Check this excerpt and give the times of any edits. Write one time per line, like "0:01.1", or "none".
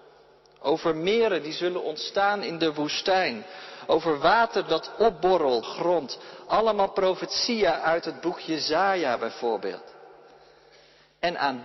0:05.6